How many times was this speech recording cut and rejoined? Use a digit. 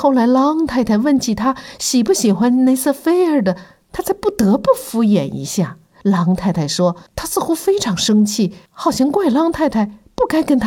3